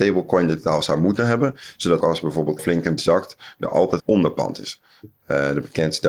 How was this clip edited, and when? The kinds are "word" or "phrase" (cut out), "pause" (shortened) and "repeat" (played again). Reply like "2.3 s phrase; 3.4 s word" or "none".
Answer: 2.0 s word; 2.6 s word; 3.0 s word; 4.0 s word